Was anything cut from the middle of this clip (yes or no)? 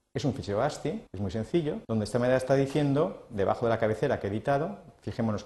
yes